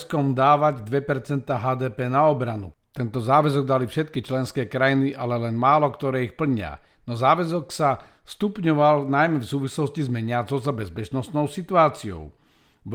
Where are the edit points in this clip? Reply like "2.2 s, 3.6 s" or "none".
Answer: none